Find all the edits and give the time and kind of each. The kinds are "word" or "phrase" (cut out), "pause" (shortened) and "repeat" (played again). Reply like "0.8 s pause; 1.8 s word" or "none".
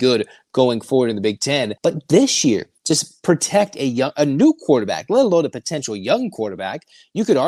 1.8 s pause; 2.8 s pause